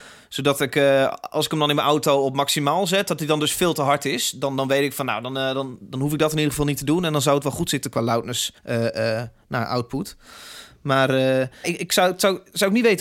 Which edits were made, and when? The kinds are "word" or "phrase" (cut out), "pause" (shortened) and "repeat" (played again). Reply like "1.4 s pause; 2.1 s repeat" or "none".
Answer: 8.6 s pause; 11.6 s word